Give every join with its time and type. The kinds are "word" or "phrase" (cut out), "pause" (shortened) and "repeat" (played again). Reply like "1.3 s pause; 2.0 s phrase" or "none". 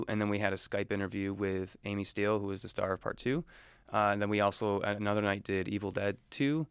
none